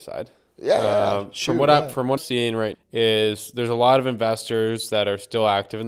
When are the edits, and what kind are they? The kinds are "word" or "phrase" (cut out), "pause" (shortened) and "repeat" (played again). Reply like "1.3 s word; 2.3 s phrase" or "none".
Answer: 2.2 s word; 2.7 s word